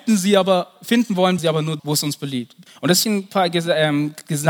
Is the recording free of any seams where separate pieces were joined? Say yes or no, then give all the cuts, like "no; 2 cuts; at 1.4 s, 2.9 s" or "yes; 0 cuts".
no; 4 cuts; at 1.4 s, 1.8 s, 2.7 s, 3.0 s